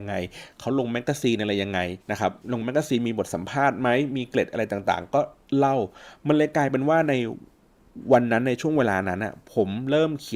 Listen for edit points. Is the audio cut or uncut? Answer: cut